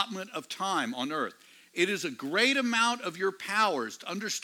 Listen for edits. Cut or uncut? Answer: uncut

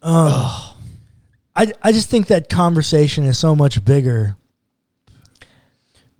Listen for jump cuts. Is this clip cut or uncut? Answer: uncut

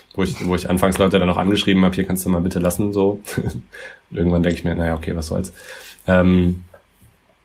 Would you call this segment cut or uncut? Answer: uncut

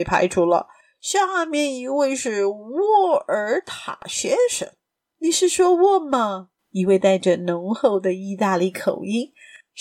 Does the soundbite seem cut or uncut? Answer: uncut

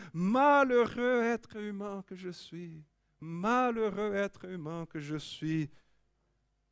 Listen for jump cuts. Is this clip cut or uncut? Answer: uncut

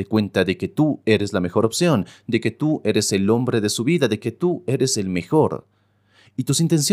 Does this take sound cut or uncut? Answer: uncut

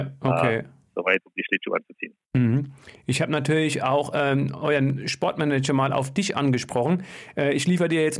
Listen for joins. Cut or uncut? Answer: uncut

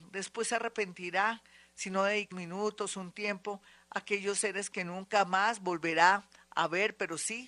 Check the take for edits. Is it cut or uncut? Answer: cut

